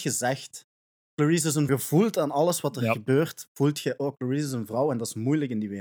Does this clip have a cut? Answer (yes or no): yes